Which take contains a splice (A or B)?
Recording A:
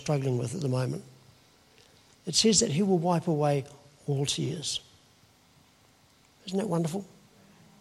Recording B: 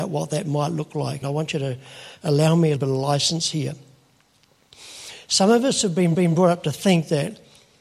B